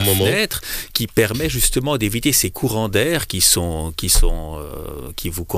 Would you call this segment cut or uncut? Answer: uncut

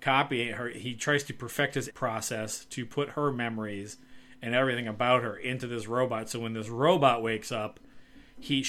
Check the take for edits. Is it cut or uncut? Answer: cut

